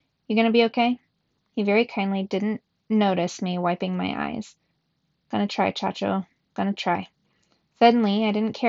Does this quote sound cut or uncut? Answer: uncut